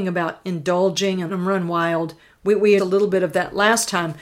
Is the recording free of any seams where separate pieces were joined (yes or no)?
no